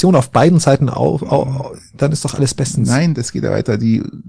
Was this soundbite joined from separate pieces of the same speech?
no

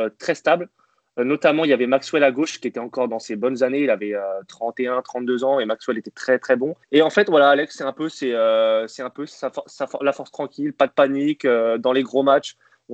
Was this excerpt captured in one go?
no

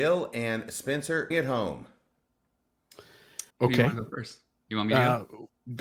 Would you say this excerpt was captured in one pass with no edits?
no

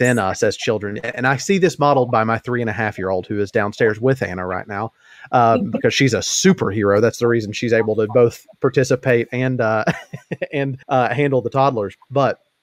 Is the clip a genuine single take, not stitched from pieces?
no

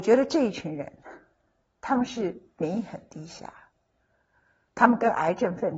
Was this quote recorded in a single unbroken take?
yes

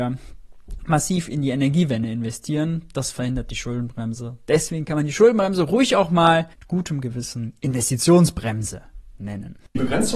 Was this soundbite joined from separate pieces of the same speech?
yes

